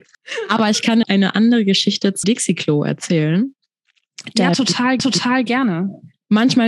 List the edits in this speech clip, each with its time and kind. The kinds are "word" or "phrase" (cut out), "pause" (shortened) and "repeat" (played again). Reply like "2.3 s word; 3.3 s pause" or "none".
1.0 s word; 2.2 s word; 5.0 s repeat